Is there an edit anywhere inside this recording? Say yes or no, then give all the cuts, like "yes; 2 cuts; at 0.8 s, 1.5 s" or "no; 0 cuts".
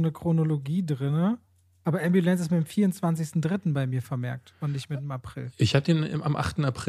no; 0 cuts